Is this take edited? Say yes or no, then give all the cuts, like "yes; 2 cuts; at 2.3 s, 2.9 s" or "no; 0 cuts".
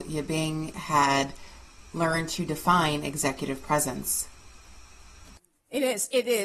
no; 0 cuts